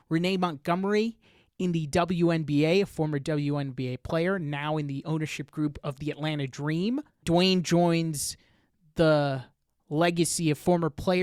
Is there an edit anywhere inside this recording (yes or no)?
no